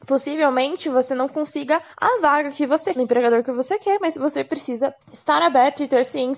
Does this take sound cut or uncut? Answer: cut